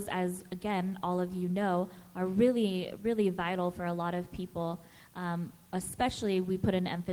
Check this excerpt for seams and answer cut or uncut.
uncut